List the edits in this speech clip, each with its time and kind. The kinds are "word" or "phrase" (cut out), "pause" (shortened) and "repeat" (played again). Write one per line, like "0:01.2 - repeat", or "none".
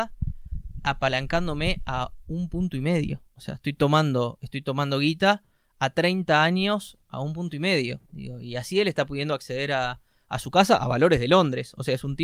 0:03.3 - pause
0:08.1 - pause